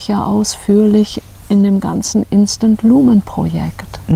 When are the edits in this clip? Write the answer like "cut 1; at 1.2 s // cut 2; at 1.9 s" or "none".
none